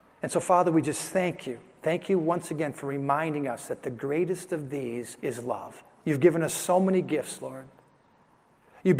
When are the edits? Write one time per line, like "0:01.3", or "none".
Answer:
0:05.2
0:06.0